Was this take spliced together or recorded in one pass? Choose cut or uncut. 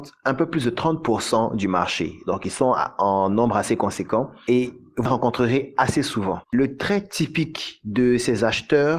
cut